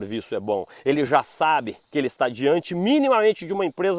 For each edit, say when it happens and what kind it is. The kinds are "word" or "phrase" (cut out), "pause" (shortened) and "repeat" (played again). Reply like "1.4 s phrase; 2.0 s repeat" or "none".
none